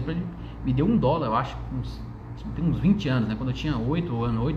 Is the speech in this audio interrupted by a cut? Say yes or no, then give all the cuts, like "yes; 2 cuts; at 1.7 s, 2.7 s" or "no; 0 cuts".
no; 0 cuts